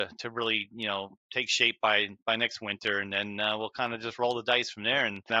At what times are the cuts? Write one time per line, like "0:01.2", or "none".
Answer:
none